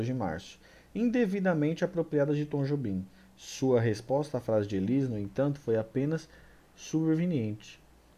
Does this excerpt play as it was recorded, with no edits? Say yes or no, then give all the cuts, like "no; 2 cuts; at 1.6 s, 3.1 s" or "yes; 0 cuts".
yes; 0 cuts